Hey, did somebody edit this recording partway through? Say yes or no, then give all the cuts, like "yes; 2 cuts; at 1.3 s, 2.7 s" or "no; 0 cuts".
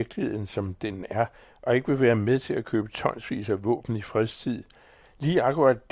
no; 0 cuts